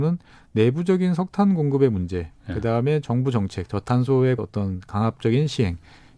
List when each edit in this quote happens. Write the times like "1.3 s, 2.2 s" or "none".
4.4 s